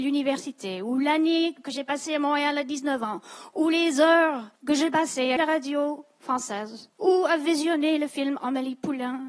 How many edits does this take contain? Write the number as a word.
three